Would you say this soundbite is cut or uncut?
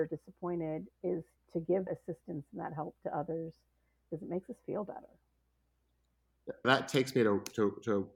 cut